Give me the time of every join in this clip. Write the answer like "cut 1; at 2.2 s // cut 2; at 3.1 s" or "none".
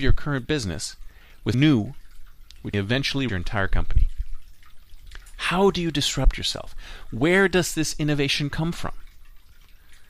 cut 1; at 1.5 s // cut 2; at 2.7 s // cut 3; at 3.3 s